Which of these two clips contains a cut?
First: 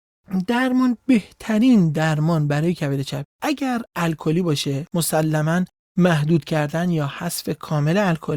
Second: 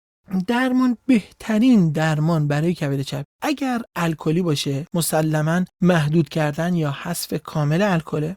second; 1 cut; at 5.7 s

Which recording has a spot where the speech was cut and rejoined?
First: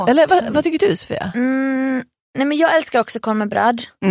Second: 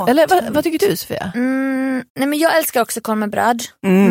second; 1 cut; at 2.1 s

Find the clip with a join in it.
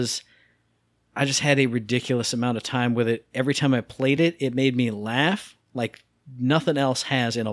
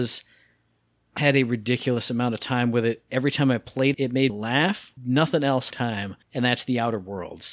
second; 6 cuts; at 1.2 s, 3.9 s, 4.3 s, 5.0 s, 5.7 s, 6.2 s

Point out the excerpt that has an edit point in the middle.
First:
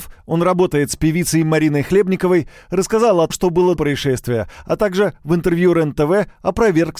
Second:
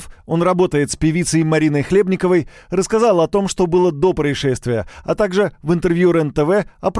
first; 2 cuts; at 3.3 s, 3.8 s

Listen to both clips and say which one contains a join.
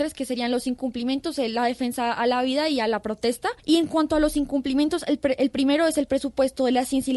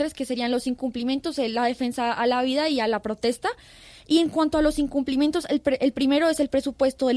first; 1 cut; at 3.6 s

